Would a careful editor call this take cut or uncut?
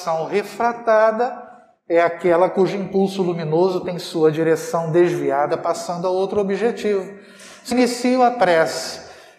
cut